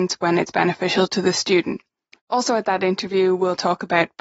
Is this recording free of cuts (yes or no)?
yes